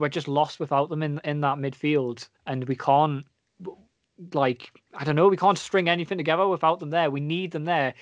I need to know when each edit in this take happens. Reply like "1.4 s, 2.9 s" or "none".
2.4 s